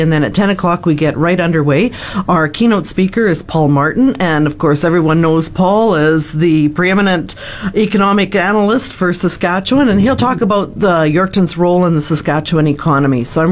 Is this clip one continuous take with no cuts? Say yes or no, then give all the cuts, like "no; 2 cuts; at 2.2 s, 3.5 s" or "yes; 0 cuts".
yes; 0 cuts